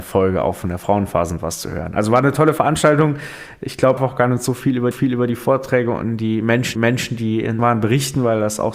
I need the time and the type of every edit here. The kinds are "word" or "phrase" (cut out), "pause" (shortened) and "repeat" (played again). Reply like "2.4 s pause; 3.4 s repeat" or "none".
4.0 s phrase; 4.9 s repeat; 6.7 s repeat; 7.6 s word